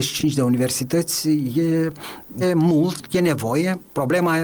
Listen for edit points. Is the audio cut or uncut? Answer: cut